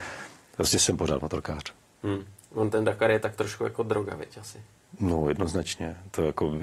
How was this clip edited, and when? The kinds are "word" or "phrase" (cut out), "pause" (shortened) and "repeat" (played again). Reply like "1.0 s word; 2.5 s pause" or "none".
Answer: none